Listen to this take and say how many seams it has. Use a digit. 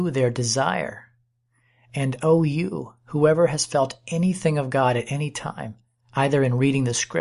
0